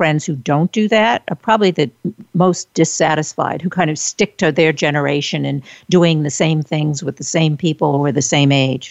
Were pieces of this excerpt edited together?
no; 0 cuts

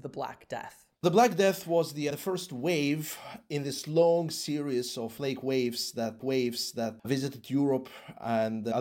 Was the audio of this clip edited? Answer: yes; 2 cuts; at 1.0 s, 6.2 s

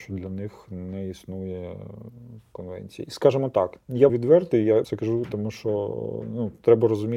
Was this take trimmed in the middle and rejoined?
yes; 3 cuts; at 3.8 s, 4.1 s, 4.8 s

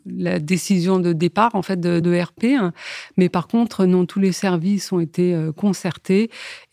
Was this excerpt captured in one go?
no; 1 cut; at 2.0 s

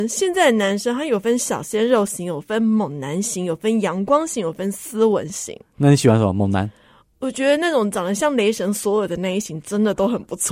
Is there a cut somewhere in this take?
no; 0 cuts

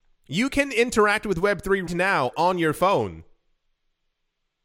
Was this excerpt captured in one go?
no; 2 cuts; at 1.9 s, 2.3 s

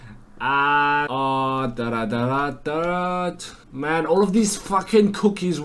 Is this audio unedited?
no; 2 cuts; at 1.1 s, 3.6 s

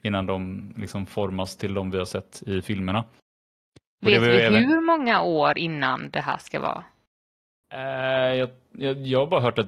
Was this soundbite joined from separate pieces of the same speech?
no; 0 cuts

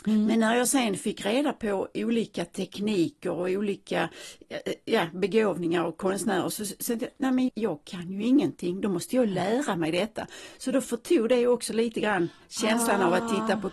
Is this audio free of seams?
no; 2 cuts; at 6.5 s, 7.5 s

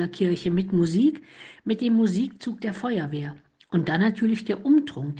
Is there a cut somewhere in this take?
no; 0 cuts

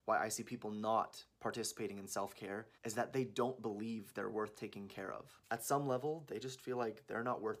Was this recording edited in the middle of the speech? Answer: yes; 1 cut; at 2.7 s

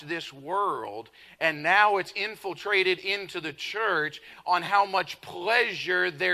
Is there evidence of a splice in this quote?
no; 0 cuts

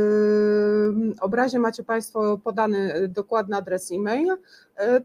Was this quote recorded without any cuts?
yes; 0 cuts

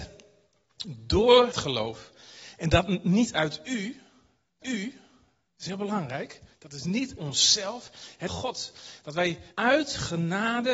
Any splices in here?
yes; 6 cuts; at 1.5 s, 4.6 s, 6.5 s, 7.2 s, 8.3 s, 9.5 s

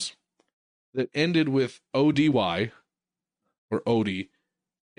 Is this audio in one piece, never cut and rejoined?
yes; 0 cuts

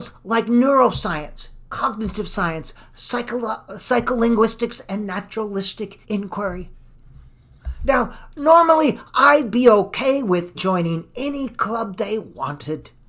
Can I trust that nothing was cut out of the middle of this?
no; 2 cuts; at 6.0 s, 10.5 s

